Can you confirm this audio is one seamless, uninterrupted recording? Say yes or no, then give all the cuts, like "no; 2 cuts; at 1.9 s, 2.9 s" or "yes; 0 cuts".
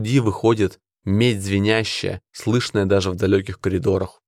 no; 1 cut; at 2.3 s